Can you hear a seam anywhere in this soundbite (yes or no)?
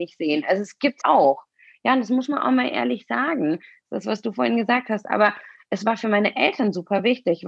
yes